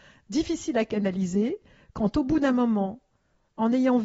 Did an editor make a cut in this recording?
no; 0 cuts

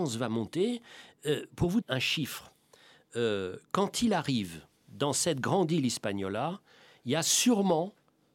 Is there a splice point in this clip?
yes; 2 cuts; at 1.8 s, 4.8 s

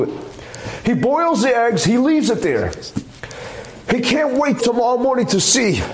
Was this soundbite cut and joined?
yes; 1 cut; at 4.6 s

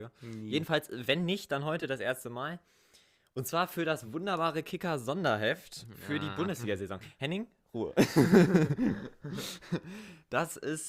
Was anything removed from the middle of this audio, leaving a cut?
no; 0 cuts

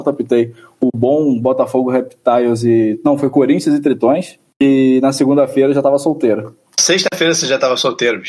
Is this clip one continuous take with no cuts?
yes; 0 cuts

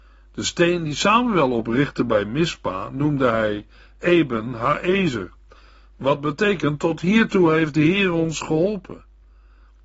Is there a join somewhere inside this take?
no; 0 cuts

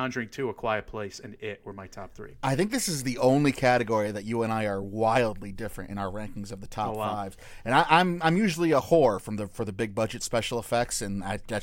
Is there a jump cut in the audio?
no; 0 cuts

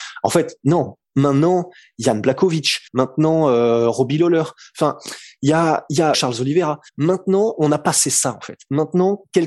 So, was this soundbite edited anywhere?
yes; 3 cuts; at 2.9 s, 6.1 s, 6.9 s

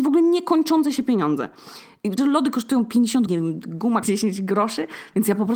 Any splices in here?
yes; 3 cuts; at 2.2 s, 3.3 s, 4.0 s

